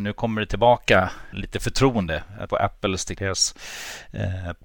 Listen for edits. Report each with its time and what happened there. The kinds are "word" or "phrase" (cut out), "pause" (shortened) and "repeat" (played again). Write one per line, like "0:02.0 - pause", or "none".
0:01.3 - word
0:02.5 - word
0:03.1 - word